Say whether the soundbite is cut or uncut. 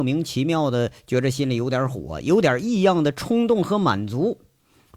uncut